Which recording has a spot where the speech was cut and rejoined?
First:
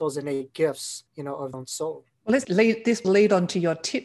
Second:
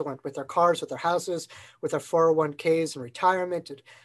first; 5 cuts; at 1.1 s, 1.5 s, 2.1 s, 2.4 s, 3.0 s

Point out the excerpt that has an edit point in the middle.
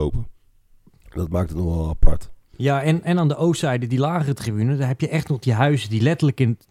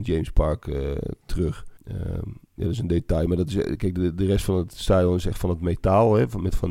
second; 1 cut; at 1.8 s

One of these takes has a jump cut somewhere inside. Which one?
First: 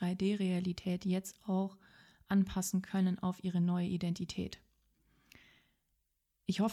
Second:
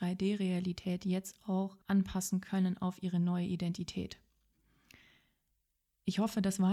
second; 1 cut; at 1.8 s

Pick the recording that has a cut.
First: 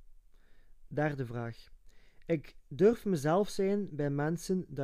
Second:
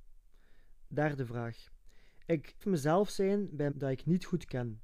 second; 2 cuts; at 2.6 s, 3.7 s

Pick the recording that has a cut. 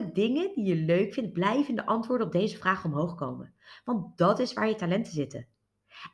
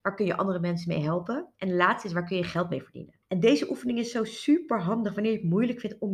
second; 2 cuts; at 1.5 s, 3.2 s

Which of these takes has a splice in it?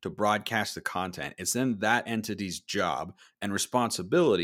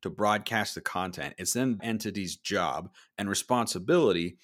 second; 1 cut; at 1.8 s

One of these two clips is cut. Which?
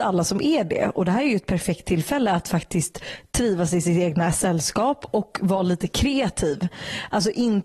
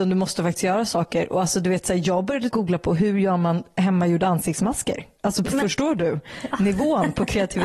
second; 1 cut; at 2.5 s

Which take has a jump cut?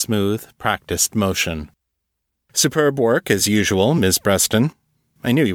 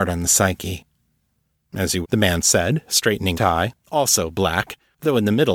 second; 3 cuts; at 2.0 s, 3.3 s, 3.8 s

